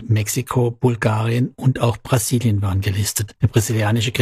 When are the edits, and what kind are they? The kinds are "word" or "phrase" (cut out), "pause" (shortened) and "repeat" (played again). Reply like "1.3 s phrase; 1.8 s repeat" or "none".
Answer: none